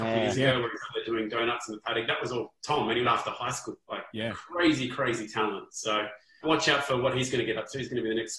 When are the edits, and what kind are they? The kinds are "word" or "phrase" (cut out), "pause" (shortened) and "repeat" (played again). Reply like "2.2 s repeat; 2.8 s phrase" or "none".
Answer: 2.6 s pause; 3.0 s phrase; 4.1 s pause; 6.4 s word